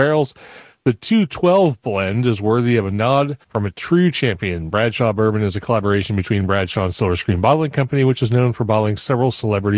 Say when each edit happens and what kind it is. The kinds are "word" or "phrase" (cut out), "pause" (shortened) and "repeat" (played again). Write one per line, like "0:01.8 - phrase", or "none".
0:03.4 - pause